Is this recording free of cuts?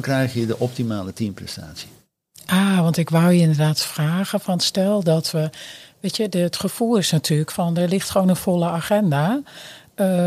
yes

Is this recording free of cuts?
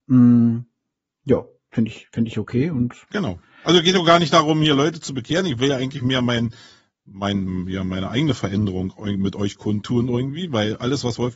yes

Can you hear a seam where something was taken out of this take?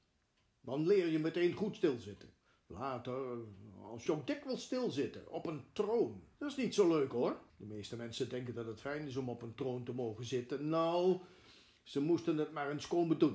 yes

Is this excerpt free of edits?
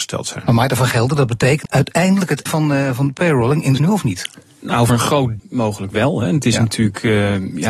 no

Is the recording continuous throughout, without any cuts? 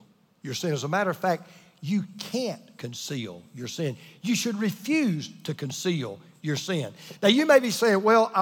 yes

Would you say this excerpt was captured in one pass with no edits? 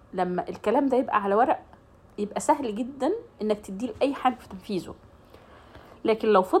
no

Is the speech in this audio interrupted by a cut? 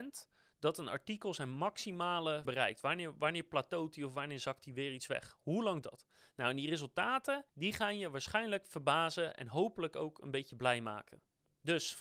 yes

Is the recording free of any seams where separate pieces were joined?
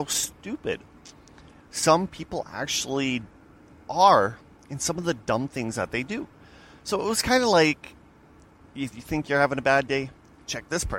yes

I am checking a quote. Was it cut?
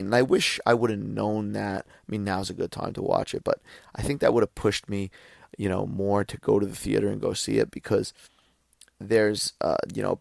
no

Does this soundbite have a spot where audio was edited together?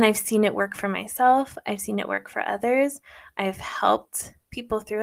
no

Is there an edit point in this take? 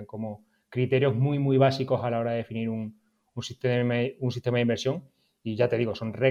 no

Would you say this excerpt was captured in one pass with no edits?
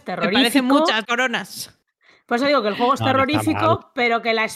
no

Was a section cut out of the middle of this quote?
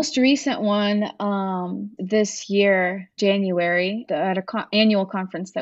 yes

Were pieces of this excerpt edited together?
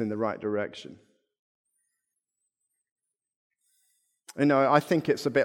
no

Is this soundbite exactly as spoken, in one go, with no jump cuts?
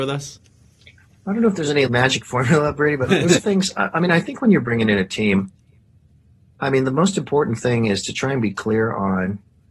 no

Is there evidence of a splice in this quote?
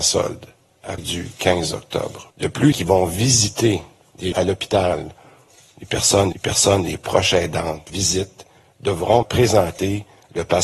yes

